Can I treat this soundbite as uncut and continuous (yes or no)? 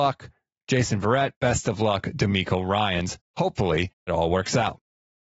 no